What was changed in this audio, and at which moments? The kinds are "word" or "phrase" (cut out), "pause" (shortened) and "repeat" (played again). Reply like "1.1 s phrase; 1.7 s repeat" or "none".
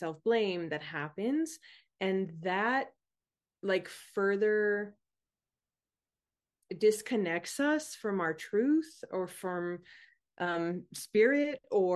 none